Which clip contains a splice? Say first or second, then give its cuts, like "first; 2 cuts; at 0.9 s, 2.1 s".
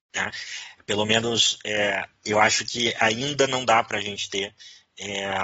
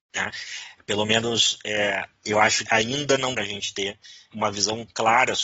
second; 3 cuts; at 2.7 s, 3.4 s, 4.3 s